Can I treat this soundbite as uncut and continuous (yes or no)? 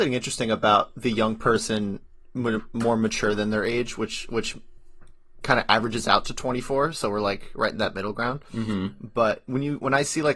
yes